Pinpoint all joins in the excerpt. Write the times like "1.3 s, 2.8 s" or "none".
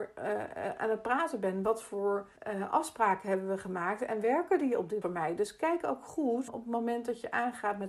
2.4 s, 5.0 s, 6.5 s